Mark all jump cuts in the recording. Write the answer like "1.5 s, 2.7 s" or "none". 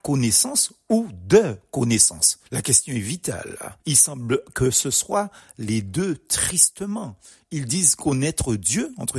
2.5 s, 3.8 s